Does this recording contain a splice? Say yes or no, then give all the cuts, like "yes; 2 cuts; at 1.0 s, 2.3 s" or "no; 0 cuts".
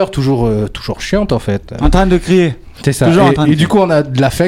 no; 0 cuts